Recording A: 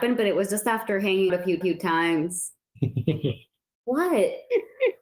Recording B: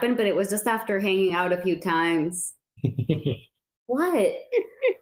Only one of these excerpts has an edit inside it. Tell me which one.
A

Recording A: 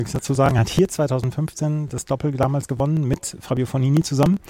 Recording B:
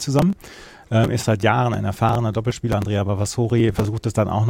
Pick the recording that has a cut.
B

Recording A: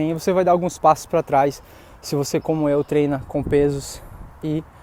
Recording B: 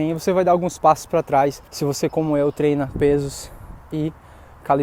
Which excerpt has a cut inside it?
B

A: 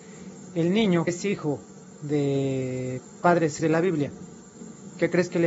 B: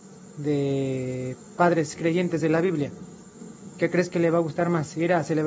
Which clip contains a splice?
A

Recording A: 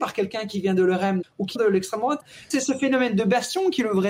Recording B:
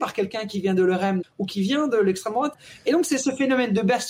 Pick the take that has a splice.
A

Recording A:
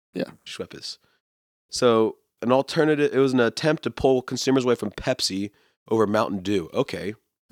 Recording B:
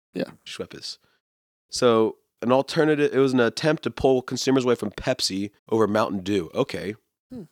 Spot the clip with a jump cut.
B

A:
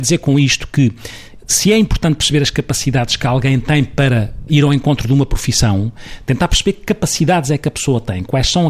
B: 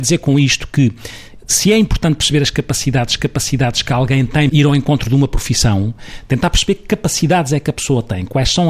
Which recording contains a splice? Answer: B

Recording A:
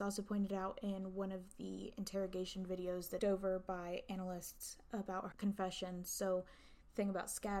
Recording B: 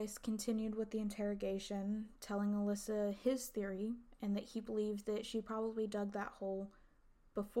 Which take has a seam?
A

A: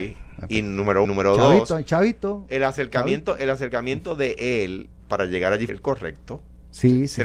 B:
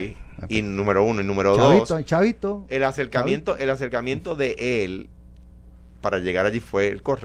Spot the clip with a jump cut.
A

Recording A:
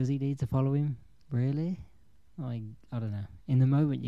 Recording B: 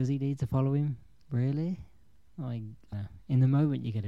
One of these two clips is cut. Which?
B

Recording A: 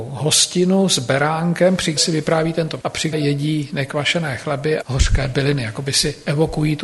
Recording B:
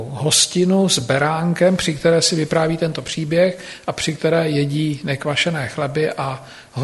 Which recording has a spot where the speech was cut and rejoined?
A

